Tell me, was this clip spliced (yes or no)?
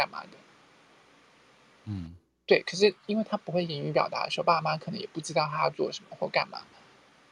no